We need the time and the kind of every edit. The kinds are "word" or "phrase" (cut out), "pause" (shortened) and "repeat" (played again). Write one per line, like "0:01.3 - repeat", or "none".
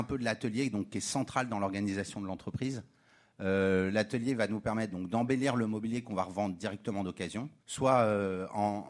0:07.6 - pause

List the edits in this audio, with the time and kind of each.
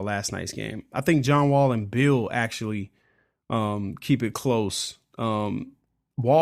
none

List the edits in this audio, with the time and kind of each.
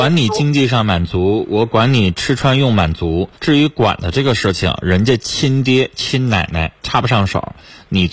0:03.4 - pause
0:06.8 - pause

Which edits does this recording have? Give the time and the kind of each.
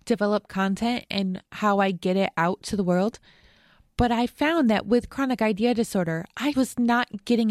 0:01.5 - pause
0:06.5 - word

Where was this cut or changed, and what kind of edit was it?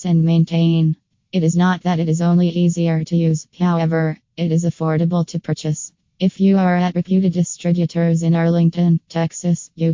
none

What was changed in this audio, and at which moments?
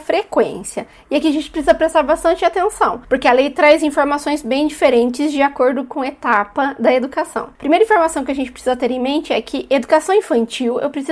none

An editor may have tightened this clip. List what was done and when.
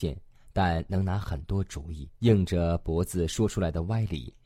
0:02.1 - pause

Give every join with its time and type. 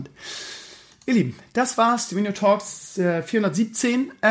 none

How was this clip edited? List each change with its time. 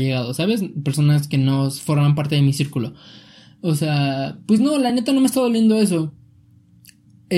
none

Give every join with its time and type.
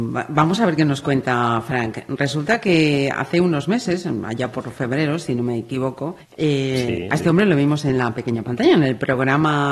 0:06.2 - pause

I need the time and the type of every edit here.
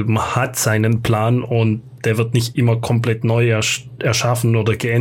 none

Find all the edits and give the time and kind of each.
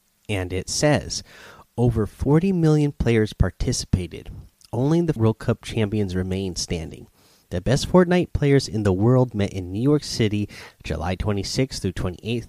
0:05.2 - word

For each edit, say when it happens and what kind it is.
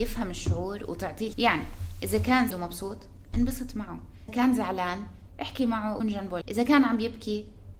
0:01.3 - word
0:02.5 - word
0:04.3 - word
0:06.0 - word
0:06.4 - word

